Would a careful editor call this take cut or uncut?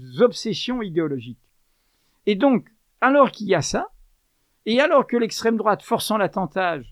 uncut